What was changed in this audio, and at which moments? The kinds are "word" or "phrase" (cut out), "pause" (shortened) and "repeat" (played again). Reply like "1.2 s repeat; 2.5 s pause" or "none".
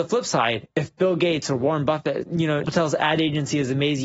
2.2 s word; 2.6 s word

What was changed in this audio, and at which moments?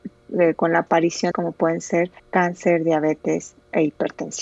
1.3 s phrase; 2.2 s pause

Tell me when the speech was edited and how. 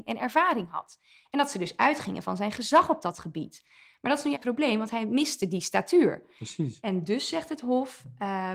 4.3 s word

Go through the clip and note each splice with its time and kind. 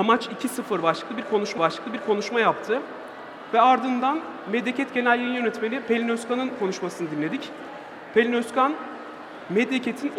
1.6 s repeat

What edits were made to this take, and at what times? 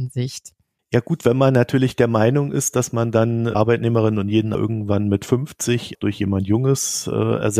3.5 s word; 4.5 s word; 5.9 s word

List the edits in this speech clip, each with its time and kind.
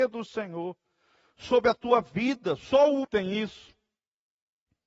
3.0 s word

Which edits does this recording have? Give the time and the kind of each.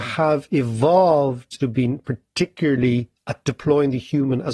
1.6 s word; 3.2 s word

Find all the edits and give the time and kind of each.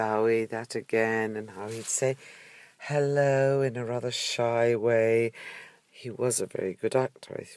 none

